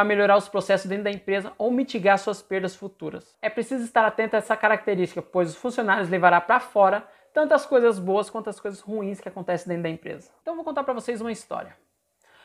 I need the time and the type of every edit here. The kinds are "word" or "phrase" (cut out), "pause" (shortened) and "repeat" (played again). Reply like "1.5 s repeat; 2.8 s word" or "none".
none